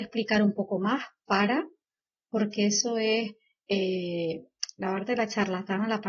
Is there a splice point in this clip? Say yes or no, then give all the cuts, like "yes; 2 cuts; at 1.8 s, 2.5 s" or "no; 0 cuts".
no; 0 cuts